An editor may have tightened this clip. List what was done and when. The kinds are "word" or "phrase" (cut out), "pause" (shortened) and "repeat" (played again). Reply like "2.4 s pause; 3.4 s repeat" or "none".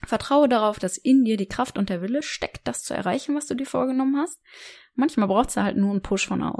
none